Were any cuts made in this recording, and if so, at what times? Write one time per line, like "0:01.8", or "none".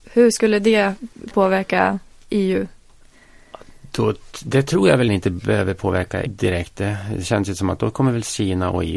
0:01.3
0:05.1
0:06.3